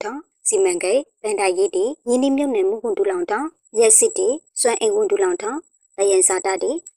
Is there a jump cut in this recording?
no; 0 cuts

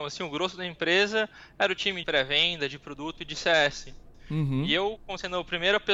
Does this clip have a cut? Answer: yes; 1 cut; at 2.0 s

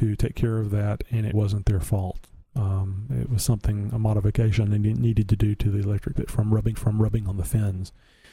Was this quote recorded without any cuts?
no; 3 cuts; at 1.3 s, 6.1 s, 6.7 s

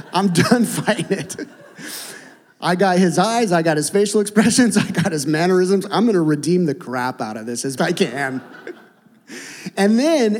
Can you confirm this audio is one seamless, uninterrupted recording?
no; 1 cut; at 7.8 s

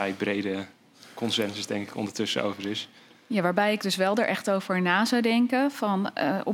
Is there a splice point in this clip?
no; 0 cuts

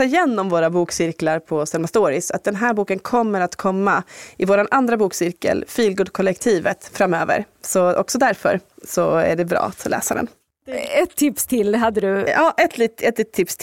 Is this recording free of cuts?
yes; 0 cuts

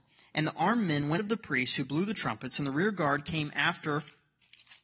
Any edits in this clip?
yes; 1 cut; at 1.2 s

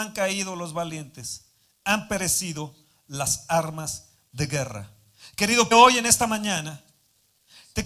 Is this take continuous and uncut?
no; 1 cut; at 5.7 s

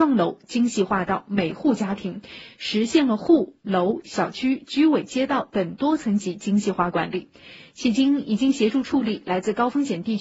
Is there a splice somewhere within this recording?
no; 0 cuts

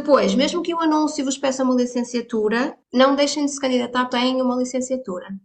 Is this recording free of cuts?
no; 2 cuts; at 2.8 s, 4.1 s

